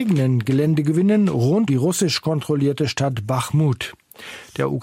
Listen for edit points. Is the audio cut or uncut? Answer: cut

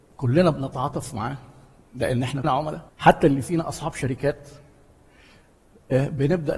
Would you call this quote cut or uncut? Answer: cut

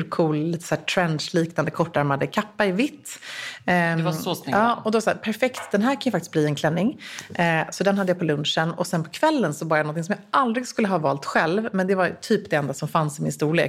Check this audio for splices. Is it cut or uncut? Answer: uncut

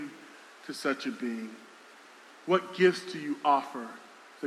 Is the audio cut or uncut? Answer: uncut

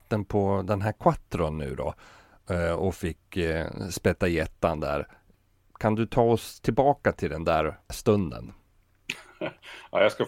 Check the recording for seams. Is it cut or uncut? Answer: uncut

